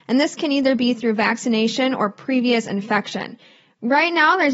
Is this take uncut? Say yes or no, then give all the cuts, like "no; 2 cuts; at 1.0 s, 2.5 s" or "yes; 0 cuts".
yes; 0 cuts